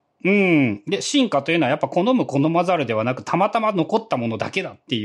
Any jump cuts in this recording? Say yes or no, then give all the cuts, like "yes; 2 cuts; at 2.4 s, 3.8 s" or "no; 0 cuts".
no; 0 cuts